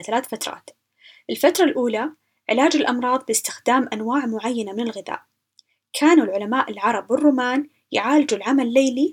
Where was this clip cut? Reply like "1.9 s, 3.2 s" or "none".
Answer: none